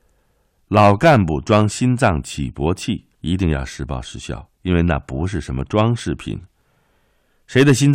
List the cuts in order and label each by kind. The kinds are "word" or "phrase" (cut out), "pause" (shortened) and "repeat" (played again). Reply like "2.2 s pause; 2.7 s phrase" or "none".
3.1 s pause; 4.5 s pause